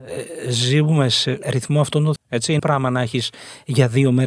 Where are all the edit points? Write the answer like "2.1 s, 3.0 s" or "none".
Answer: 1.4 s, 2.2 s, 2.6 s